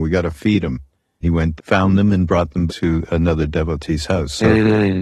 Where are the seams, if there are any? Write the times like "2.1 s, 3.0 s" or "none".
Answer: 1.2 s, 1.6 s, 2.7 s